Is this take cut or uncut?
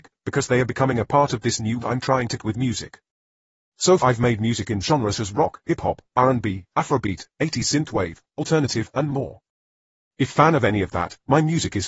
cut